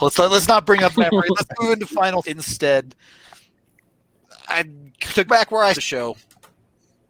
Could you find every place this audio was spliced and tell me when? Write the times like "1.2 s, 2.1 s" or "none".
0.9 s, 2.2 s, 5.3 s, 5.7 s